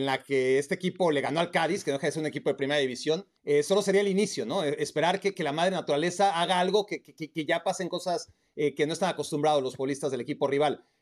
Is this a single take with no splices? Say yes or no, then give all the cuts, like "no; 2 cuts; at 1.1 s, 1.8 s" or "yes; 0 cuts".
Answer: no; 1 cut; at 3.4 s